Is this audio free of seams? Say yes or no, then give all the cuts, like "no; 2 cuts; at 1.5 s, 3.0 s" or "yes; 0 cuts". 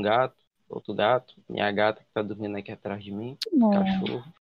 yes; 0 cuts